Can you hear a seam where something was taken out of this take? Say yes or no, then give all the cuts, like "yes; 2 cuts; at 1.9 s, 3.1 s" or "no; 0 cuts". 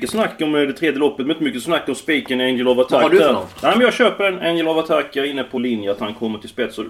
yes; 1 cut; at 5.6 s